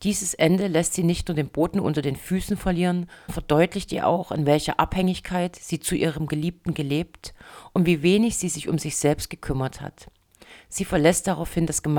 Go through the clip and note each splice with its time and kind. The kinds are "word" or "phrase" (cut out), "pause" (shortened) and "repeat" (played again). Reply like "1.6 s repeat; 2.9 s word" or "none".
3.3 s word